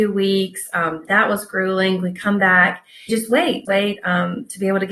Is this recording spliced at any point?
yes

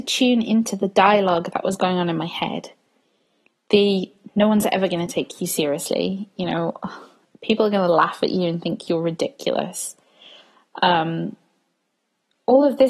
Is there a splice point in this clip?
no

